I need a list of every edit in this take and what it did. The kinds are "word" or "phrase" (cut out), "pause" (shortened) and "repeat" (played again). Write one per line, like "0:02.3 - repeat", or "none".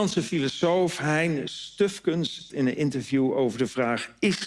0:02.5 - word